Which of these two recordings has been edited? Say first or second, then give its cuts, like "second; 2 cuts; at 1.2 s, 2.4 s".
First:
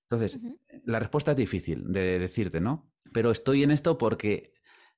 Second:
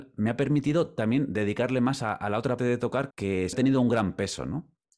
second; 3 cuts; at 2.6 s, 3.1 s, 3.5 s